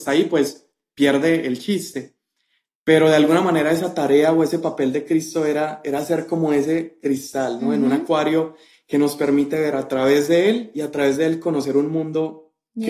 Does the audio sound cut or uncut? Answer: uncut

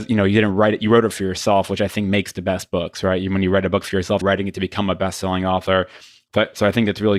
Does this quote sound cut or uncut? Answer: cut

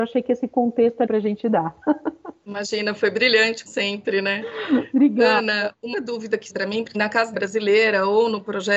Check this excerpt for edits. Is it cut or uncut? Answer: cut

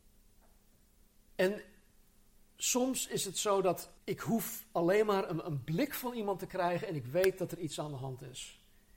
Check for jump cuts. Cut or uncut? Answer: cut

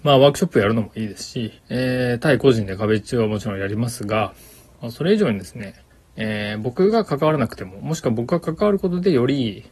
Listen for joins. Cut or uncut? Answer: cut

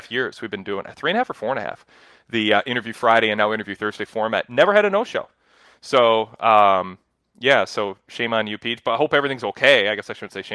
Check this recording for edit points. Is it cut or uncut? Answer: uncut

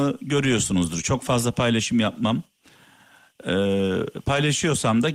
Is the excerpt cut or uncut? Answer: uncut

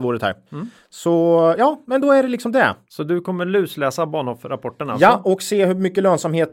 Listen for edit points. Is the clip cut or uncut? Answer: uncut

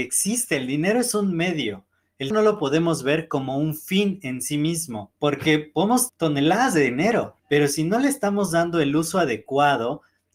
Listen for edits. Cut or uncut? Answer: cut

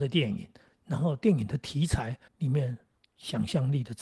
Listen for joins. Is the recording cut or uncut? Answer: cut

